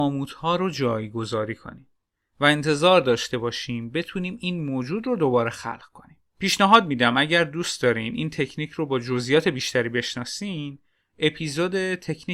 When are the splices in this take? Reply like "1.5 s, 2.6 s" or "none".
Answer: none